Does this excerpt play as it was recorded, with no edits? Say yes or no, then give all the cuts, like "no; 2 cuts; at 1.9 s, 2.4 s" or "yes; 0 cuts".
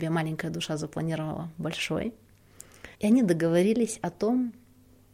no; 1 cut; at 2.9 s